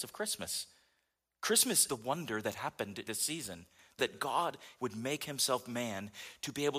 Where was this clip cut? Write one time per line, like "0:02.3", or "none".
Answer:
0:01.9
0:03.1
0:04.0
0:04.8